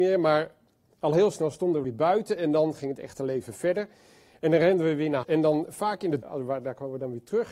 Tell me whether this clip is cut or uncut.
cut